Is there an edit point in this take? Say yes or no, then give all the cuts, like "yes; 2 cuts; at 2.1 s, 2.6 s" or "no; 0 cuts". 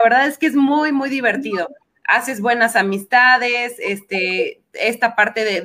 no; 0 cuts